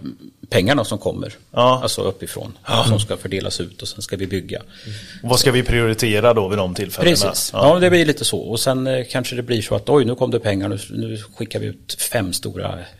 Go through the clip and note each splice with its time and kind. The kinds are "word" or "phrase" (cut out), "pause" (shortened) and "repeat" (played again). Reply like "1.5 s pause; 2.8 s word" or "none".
none